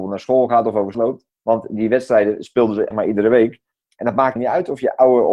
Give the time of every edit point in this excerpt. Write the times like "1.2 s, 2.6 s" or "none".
0.9 s, 1.3 s, 2.9 s, 4.4 s